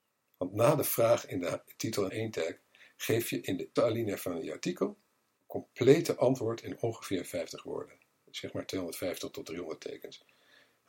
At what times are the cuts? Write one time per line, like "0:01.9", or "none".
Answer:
0:02.1
0:03.8
0:05.4